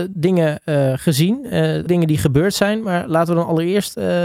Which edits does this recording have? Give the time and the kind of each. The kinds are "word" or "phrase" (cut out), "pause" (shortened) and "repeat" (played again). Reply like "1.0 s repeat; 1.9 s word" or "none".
1.9 s word